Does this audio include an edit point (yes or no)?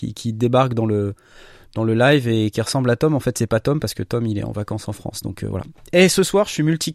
no